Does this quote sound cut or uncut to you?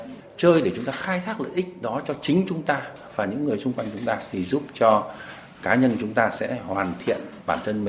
uncut